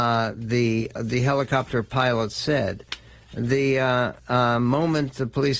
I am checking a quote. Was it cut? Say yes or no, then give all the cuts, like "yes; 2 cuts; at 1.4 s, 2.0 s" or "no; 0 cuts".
yes; 2 cuts; at 1.0 s, 4.2 s